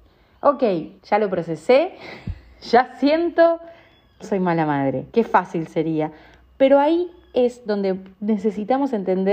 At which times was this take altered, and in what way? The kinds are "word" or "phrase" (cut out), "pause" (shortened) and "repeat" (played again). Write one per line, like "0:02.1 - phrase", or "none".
0:01.0 - pause
0:04.2 - word
0:05.1 - pause
0:08.1 - pause

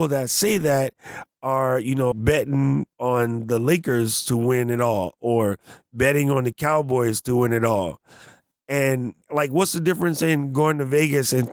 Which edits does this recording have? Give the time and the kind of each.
0:02.1 - word
0:02.9 - pause
0:09.2 - pause

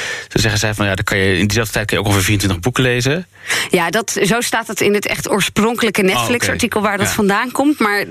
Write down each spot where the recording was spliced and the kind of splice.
none

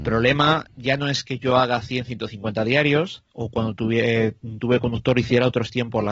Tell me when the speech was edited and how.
0:03.3 - pause

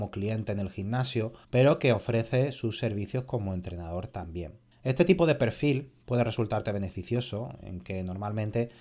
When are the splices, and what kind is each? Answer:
0:01.4 - pause
0:04.7 - pause

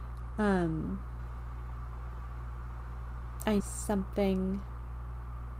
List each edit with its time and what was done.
0:03.6 - word

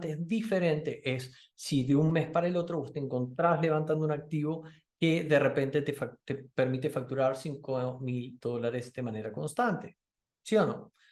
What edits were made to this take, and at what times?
none

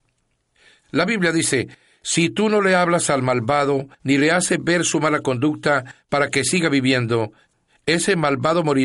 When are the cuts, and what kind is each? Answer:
0:03.9 - pause

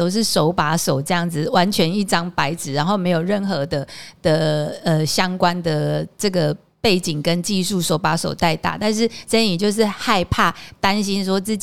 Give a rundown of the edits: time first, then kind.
none

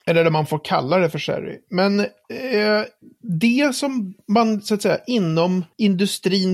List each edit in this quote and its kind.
none

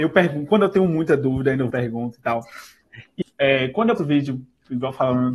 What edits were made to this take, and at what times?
0:01.7 - word
0:03.2 - word
0:04.0 - word

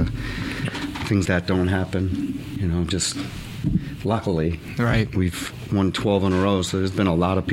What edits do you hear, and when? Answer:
0:01.2 - word

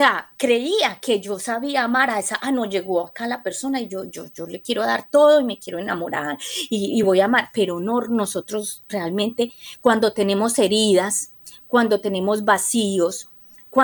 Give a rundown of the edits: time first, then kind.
none

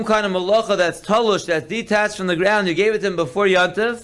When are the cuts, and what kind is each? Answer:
none

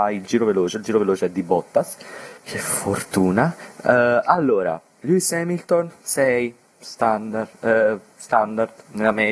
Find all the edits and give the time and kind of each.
0:02.4 - pause

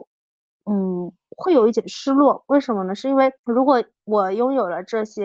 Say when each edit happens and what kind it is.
0:03.4 - pause

